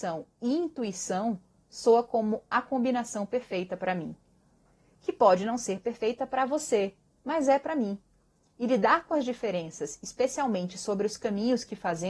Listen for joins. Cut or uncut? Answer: uncut